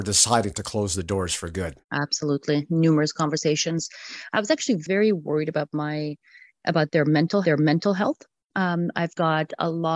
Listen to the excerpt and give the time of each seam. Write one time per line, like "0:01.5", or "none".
0:01.8
0:07.4